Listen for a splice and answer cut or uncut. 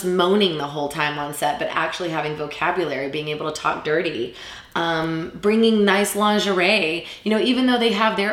uncut